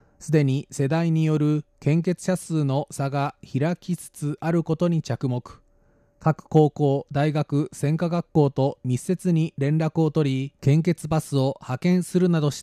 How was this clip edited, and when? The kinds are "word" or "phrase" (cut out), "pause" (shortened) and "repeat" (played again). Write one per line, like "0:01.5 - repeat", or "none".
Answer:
0:10.6 - pause